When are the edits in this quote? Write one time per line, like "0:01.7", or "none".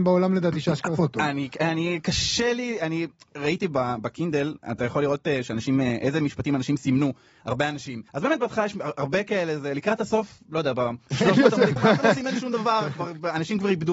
0:01.0
0:08.1
0:11.0
0:11.8